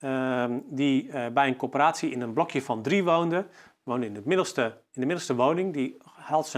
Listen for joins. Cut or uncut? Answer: uncut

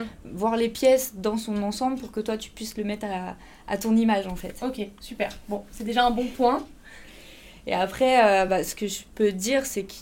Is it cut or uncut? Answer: uncut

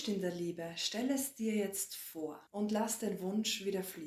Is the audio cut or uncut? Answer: cut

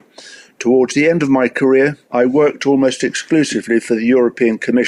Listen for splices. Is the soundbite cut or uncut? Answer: cut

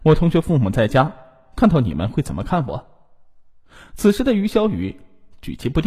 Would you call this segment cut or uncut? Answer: uncut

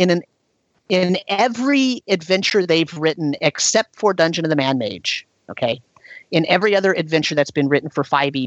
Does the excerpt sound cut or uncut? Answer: uncut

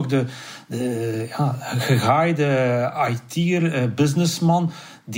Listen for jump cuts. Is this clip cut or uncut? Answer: uncut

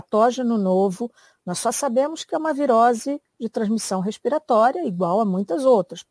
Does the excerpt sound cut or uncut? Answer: uncut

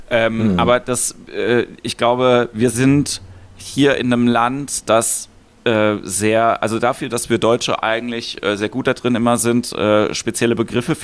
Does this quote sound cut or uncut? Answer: uncut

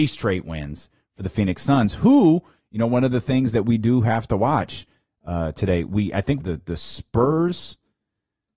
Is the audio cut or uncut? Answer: cut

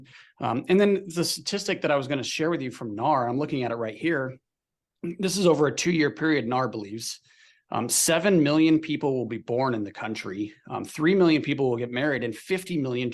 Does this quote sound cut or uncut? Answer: uncut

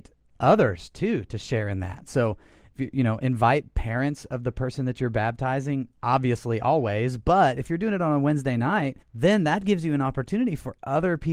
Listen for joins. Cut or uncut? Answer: cut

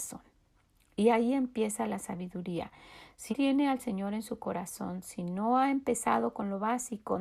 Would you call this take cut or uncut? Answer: cut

